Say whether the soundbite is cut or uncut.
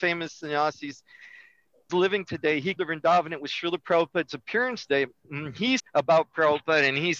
cut